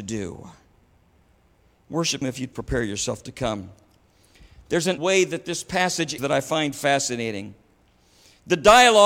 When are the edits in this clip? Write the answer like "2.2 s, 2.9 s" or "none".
2.2 s, 2.5 s, 5.0 s, 6.2 s